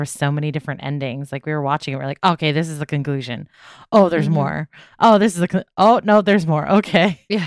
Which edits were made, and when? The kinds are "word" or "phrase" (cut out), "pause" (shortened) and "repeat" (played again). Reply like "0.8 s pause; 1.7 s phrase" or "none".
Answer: none